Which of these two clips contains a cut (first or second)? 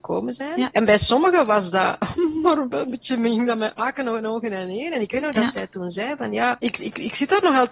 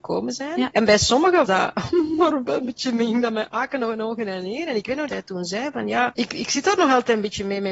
second